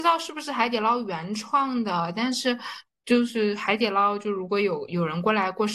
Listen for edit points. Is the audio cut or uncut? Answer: uncut